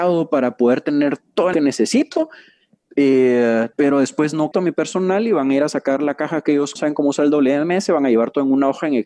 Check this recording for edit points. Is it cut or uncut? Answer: cut